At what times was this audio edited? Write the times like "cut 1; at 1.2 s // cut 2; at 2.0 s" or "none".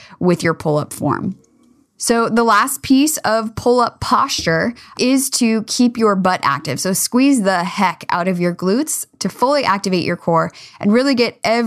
none